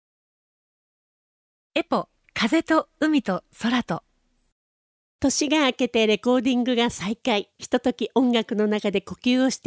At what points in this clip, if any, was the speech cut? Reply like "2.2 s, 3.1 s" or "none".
2.1 s, 4.9 s, 7.5 s